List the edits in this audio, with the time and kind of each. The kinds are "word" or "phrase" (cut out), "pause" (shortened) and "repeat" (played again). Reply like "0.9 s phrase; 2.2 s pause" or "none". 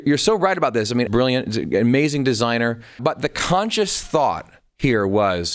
1.1 s phrase; 3.0 s word